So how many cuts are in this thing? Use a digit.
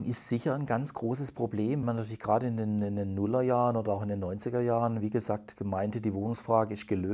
1